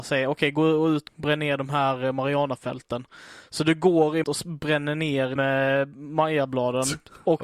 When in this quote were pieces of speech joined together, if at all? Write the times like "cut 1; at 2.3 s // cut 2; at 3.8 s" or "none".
cut 1; at 1.1 s // cut 2; at 4.2 s // cut 3; at 5.4 s